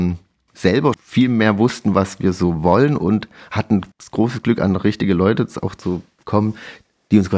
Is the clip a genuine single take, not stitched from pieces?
no; 2 cuts; at 0.9 s, 3.9 s

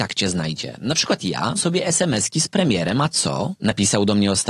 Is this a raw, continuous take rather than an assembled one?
no; 1 cut; at 1.6 s

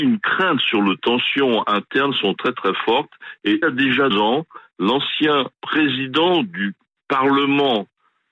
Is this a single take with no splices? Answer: no; 4 cuts; at 1.0 s, 3.6 s, 4.1 s, 5.5 s

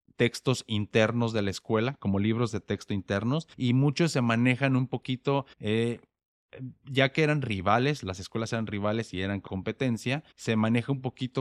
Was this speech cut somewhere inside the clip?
yes; 4 cuts; at 3.5 s, 5.5 s, 9.5 s, 10.3 s

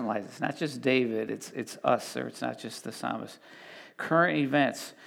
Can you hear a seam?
no; 0 cuts

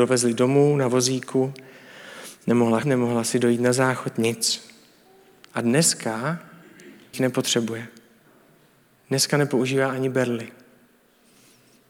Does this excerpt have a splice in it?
yes; 2 cuts; at 2.8 s, 7.1 s

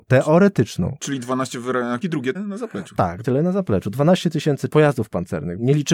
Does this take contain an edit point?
yes; 4 cuts; at 2.0 s, 2.3 s, 3.2 s, 4.7 s

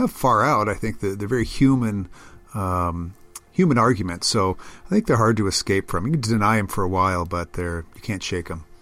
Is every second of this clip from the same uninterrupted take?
yes; 0 cuts

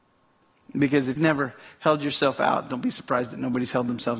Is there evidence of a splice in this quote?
yes; 1 cut; at 1.2 s

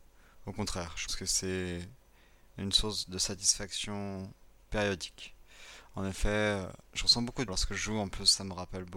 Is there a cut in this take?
yes; 4 cuts; at 1.1 s, 4.6 s, 6.8 s, 7.5 s

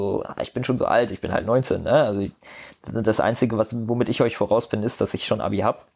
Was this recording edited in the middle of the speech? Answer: no; 0 cuts

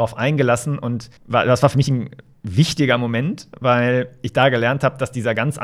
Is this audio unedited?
no; 1 cut; at 1.2 s

